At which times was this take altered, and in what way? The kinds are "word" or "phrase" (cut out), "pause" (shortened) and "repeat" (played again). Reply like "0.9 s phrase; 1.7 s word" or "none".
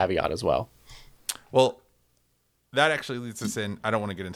none

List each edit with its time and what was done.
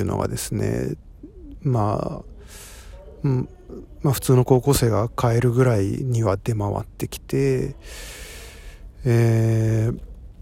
none

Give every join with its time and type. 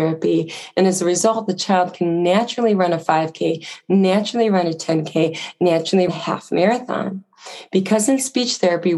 6.1 s word

